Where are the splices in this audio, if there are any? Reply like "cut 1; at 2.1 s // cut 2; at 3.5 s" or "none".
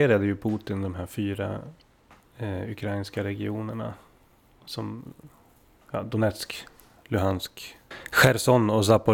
none